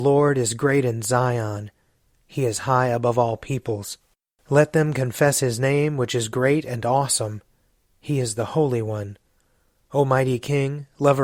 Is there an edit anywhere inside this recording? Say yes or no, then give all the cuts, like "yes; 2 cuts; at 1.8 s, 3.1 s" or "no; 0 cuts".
no; 0 cuts